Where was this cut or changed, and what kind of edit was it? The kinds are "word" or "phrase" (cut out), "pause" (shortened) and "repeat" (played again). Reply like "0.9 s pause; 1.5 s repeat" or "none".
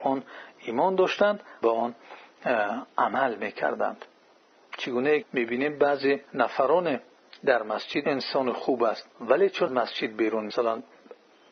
1.6 s phrase; 2.9 s pause; 5.2 s word; 6.3 s pause; 8.0 s word; 9.1 s pause; 9.7 s word; 10.5 s word